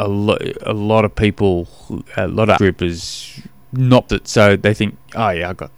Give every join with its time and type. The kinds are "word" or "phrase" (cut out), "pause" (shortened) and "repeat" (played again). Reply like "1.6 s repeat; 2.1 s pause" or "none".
2.1 s pause; 2.6 s word; 4.1 s word